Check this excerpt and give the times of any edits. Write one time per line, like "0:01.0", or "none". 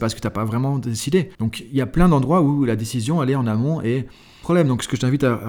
0:01.3
0:04.4